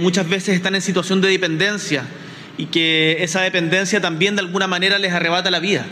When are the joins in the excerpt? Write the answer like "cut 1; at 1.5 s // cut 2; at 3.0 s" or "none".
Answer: none